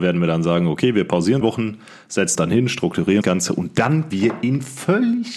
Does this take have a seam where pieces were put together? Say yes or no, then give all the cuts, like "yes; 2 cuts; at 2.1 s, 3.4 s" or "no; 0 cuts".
yes; 4 cuts; at 1.4 s, 2.4 s, 3.2 s, 4.1 s